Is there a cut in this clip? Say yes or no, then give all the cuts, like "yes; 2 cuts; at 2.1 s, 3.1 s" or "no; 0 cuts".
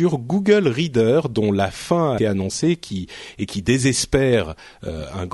yes; 1 cut; at 2.2 s